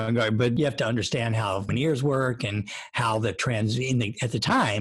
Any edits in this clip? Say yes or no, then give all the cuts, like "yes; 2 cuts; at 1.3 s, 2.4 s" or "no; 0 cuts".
yes; 1 cut; at 1.7 s